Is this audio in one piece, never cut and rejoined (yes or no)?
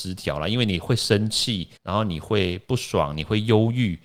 no